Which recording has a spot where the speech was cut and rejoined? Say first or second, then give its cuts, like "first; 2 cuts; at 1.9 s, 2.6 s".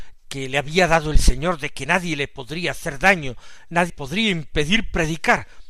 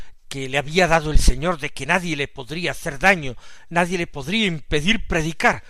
first; 1 cut; at 3.9 s